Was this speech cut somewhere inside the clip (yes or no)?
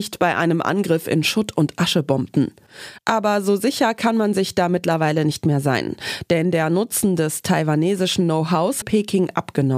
yes